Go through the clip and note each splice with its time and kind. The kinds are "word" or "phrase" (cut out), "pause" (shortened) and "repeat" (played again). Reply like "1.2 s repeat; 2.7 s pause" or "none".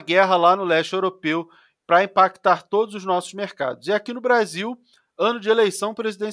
none